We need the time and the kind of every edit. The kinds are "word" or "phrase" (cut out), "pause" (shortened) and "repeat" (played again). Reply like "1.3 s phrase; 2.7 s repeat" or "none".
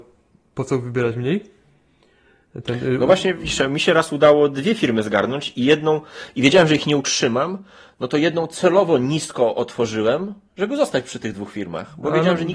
none